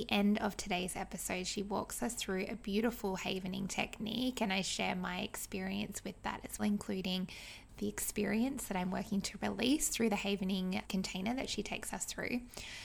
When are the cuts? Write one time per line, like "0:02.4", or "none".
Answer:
0:06.6
0:10.8